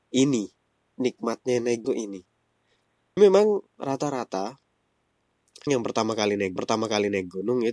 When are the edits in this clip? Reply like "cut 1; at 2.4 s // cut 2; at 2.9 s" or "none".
cut 1; at 1.8 s // cut 2; at 3.2 s // cut 3; at 5.7 s // cut 4; at 6.6 s